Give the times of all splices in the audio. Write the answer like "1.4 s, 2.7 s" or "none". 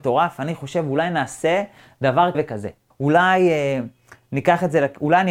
2.3 s, 2.9 s